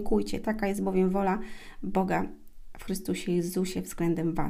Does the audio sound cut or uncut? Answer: uncut